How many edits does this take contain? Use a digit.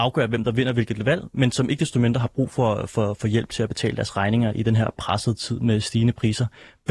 0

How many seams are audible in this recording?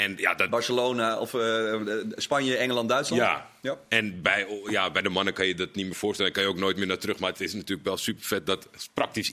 0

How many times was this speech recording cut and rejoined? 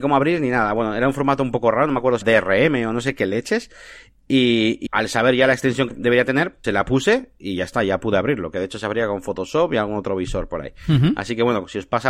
4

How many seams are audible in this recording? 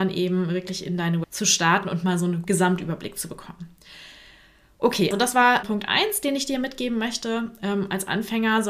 4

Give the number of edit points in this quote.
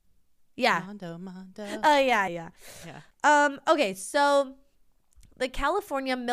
2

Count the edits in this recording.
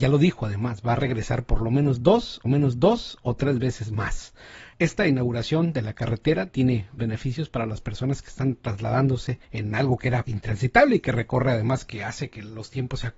5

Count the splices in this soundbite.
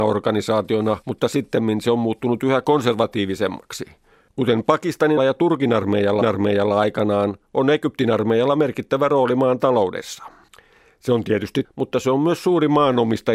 6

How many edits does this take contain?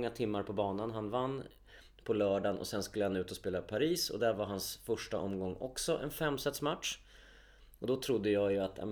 0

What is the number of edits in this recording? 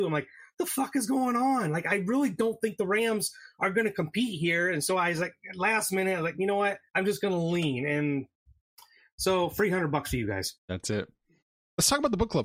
2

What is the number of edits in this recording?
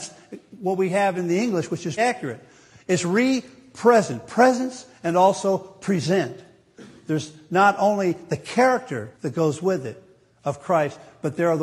2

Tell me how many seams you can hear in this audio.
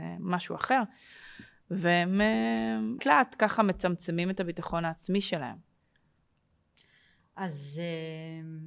1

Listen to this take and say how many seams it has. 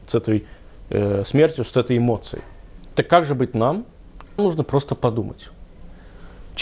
1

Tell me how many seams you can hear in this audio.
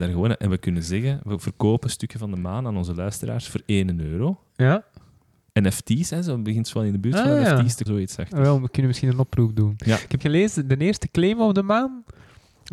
2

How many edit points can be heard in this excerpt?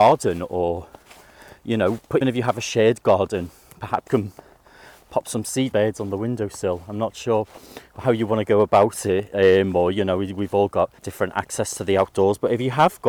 4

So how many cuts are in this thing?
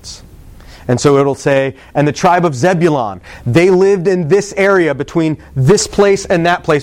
0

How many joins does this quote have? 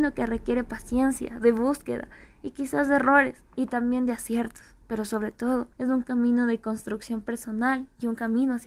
1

